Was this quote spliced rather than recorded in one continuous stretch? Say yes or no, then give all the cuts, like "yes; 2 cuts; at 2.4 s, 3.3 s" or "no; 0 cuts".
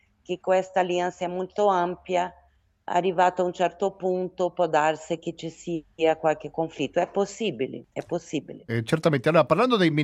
no; 0 cuts